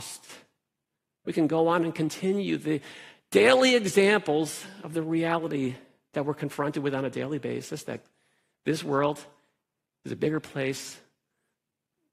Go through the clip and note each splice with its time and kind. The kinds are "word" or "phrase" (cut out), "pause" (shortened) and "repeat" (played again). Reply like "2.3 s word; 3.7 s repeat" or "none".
none

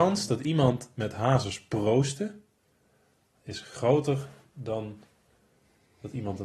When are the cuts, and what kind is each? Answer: none

